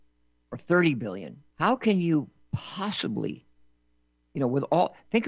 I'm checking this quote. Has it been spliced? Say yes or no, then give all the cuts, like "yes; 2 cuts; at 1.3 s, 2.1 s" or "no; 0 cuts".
yes; 1 cut; at 1.5 s